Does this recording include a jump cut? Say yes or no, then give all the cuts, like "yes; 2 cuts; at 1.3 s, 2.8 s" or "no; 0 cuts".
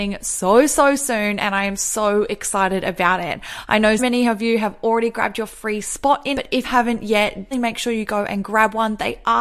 yes; 4 cuts; at 4.0 s, 6.3 s, 6.6 s, 7.5 s